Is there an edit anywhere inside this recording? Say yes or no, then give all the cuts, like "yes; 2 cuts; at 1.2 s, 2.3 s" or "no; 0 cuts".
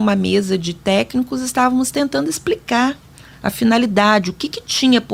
no; 0 cuts